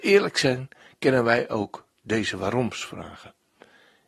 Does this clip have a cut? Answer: no; 0 cuts

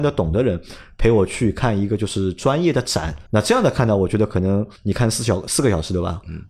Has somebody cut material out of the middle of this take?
yes; 2 cuts; at 3.3 s, 4.8 s

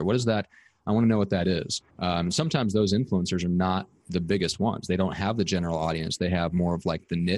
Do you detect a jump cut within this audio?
yes; 1 cut; at 1.9 s

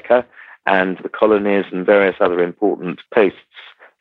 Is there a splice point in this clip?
yes; 2 cuts; at 1.0 s, 3.1 s

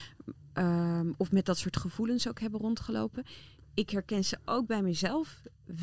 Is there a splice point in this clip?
no; 0 cuts

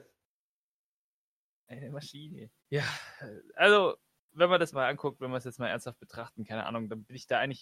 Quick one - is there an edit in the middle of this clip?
yes; 2 cuts; at 2.6 s, 4.7 s

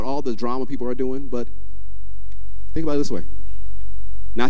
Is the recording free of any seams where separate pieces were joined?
yes; 0 cuts

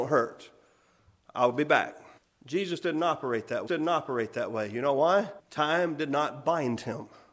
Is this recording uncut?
no; 3 cuts; at 2.2 s, 3.7 s, 5.4 s

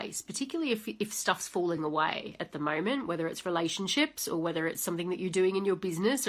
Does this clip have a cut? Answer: no; 0 cuts

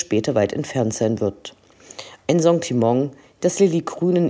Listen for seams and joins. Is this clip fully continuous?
yes; 0 cuts

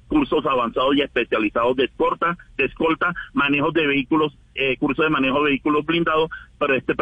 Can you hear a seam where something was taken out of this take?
yes; 1 cut; at 4.6 s

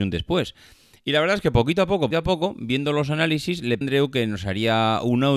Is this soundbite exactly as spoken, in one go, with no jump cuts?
no; 2 cuts; at 2.1 s, 3.8 s

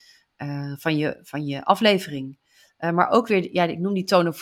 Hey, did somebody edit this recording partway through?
no; 0 cuts

